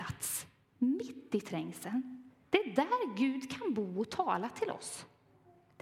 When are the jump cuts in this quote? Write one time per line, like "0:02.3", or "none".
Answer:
0:02.4